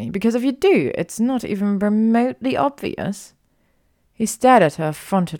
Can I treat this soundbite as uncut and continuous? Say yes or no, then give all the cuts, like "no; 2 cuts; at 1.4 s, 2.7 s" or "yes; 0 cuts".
yes; 0 cuts